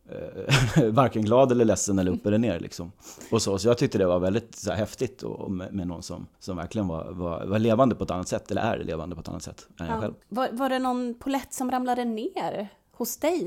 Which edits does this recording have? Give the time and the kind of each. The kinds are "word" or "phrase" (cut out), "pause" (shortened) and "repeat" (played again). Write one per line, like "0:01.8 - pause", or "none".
0:06.3 - pause
0:10.2 - pause